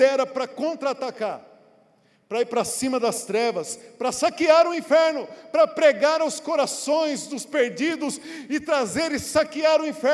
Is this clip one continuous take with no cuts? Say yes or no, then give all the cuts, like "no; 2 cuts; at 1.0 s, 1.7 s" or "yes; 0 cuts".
yes; 0 cuts